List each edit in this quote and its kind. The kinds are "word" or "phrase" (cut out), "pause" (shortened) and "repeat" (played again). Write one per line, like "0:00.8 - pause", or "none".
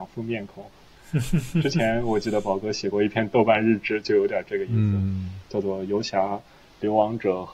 none

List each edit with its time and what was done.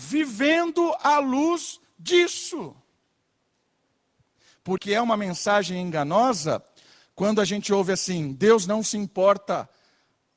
0:04.8 - word

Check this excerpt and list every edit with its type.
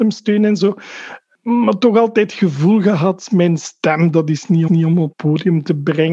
0:04.7 - repeat
0:05.1 - word

